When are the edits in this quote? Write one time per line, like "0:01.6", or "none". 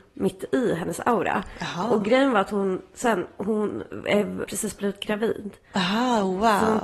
0:04.4